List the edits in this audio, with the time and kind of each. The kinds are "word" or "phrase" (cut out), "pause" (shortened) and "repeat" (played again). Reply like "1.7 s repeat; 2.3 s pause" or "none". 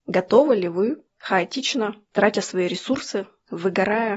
1.1 s word